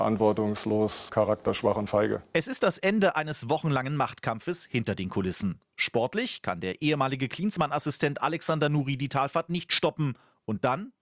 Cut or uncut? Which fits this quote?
cut